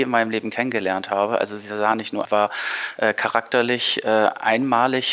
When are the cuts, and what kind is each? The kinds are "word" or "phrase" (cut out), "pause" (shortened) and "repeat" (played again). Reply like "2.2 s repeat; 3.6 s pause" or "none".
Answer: 2.2 s phrase